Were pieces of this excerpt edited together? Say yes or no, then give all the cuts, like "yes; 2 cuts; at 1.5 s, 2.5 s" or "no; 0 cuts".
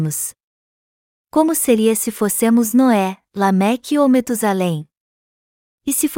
no; 0 cuts